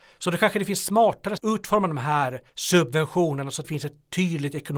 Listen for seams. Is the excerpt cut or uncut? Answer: cut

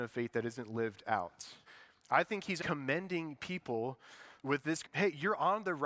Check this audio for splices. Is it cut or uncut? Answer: cut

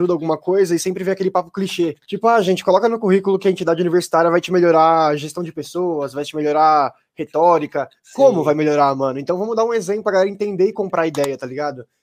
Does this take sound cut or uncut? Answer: cut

